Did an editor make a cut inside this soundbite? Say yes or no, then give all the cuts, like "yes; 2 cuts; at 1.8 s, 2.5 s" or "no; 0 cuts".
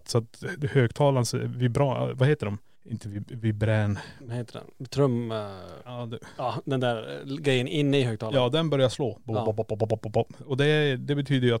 no; 0 cuts